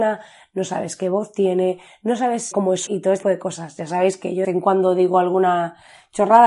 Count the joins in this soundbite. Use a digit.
4